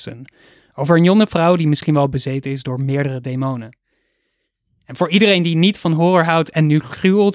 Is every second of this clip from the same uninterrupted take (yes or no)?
yes